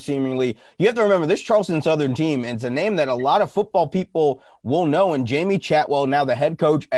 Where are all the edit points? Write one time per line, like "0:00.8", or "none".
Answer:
none